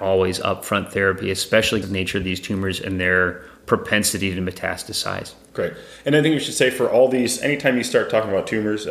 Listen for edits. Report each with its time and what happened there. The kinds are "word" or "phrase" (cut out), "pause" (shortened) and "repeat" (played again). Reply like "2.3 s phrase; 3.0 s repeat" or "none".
1.8 s phrase